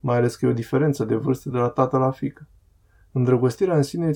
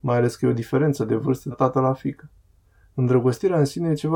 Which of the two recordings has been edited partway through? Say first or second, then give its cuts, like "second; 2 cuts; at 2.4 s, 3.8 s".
second; 1 cut; at 1.5 s